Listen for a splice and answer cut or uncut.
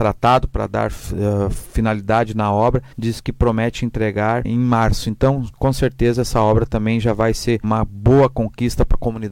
cut